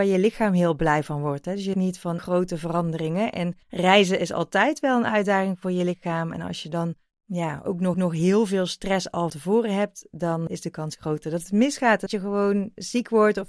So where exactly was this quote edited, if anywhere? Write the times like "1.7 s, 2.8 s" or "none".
1.7 s, 2.2 s, 3.6 s, 7.1 s, 7.9 s, 9.3 s, 10.5 s, 12.1 s